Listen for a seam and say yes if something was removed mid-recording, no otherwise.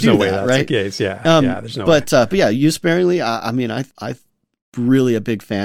yes